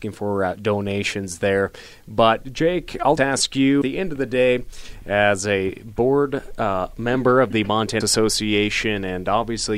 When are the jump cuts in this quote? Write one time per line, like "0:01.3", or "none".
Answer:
0:03.2
0:03.8
0:08.0